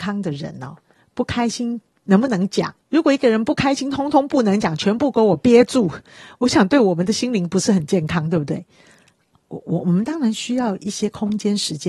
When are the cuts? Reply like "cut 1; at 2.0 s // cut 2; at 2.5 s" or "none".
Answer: cut 1; at 2.8 s